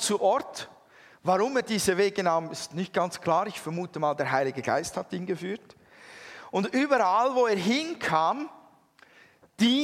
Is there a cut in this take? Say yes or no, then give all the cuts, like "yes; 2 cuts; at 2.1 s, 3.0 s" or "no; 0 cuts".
no; 0 cuts